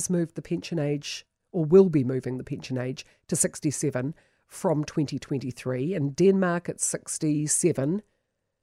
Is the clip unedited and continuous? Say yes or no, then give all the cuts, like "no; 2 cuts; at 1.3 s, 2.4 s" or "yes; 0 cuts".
yes; 0 cuts